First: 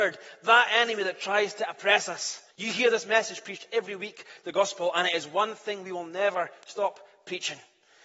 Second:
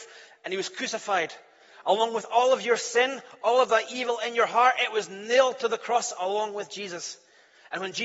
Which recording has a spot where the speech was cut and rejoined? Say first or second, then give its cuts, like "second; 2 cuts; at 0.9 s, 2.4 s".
first; 1 cut; at 2.5 s